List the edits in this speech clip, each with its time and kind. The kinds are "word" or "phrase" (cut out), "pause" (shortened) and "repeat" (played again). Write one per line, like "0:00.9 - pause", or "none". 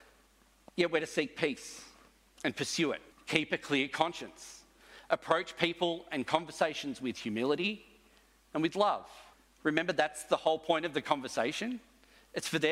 0:03.1 - pause
0:09.3 - pause